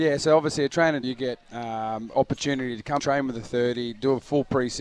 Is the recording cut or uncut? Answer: cut